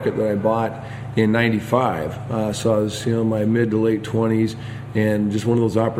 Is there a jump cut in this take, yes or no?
no